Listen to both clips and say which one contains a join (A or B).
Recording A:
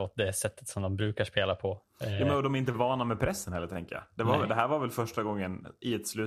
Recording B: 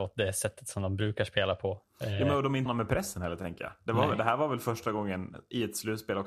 B